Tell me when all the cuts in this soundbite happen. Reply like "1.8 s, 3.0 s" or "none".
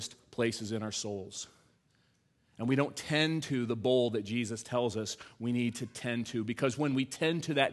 none